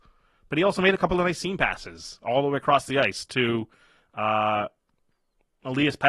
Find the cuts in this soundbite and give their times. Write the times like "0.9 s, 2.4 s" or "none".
none